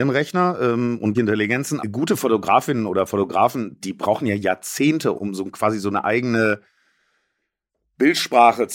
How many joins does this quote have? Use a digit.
4